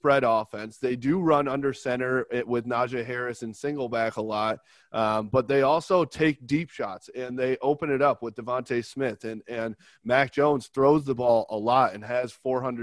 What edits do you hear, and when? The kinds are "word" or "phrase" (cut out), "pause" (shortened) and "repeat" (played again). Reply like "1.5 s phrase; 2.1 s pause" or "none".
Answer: none